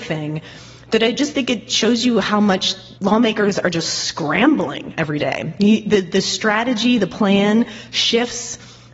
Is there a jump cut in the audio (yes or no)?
yes